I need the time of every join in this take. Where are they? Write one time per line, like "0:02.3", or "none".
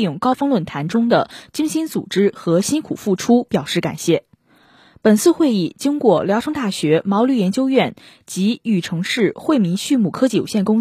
none